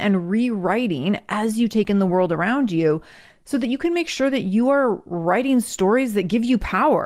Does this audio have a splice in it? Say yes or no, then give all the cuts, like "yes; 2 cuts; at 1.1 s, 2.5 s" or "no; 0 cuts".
no; 0 cuts